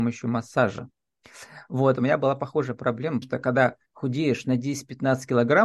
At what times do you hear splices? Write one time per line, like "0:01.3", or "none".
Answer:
0:02.0
0:03.2
0:03.9

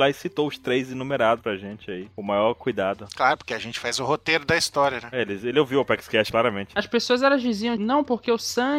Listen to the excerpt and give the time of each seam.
0:07.8

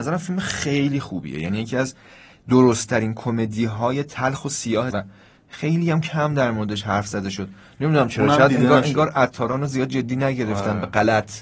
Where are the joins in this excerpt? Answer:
0:04.9

